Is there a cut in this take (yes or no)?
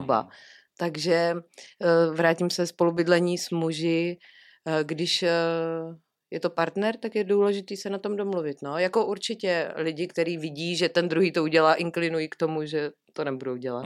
no